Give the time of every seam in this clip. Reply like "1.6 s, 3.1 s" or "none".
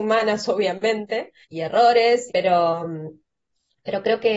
1.4 s, 2.3 s